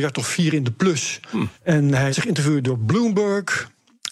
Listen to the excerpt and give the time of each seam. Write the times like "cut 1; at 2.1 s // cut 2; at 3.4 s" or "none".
cut 1; at 1.5 s // cut 2; at 2.1 s